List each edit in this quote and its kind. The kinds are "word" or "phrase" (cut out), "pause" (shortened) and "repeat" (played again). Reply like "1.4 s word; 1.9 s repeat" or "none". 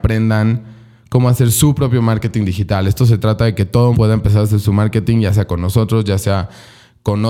3.9 s word